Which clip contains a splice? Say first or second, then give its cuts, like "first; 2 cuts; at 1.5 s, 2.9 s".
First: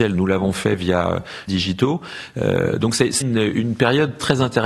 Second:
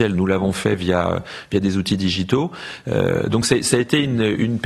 first; 2 cuts; at 1.5 s, 3.2 s